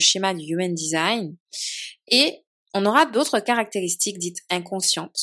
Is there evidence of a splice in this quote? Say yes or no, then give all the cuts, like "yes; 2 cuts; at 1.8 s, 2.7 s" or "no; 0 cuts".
no; 0 cuts